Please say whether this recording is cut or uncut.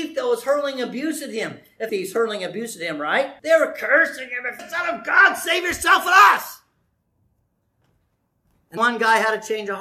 cut